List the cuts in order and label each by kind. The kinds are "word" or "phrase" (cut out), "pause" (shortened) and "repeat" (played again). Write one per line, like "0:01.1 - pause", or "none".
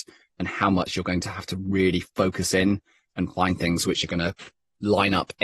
none